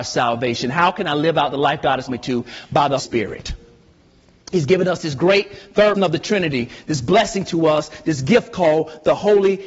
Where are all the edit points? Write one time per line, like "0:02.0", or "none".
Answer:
0:02.1
0:03.0
0:06.0

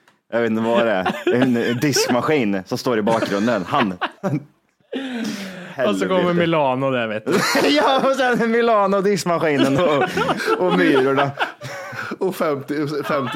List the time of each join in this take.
0:04.2
0:09.8

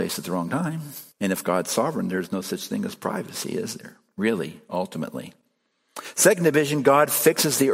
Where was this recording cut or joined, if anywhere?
0:01.1

